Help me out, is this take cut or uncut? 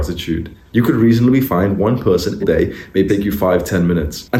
cut